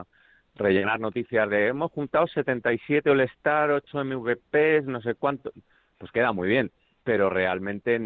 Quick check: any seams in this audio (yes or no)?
no